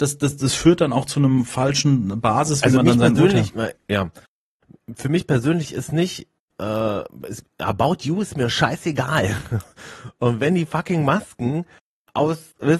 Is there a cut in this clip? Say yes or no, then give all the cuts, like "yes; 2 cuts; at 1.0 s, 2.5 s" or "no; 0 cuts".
no; 0 cuts